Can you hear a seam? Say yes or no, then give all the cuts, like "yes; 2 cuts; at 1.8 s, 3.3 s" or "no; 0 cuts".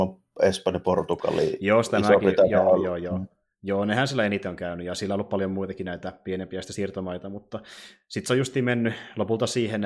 no; 0 cuts